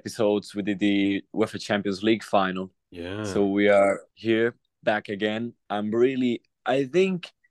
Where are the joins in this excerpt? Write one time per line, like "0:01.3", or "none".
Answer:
0:04.1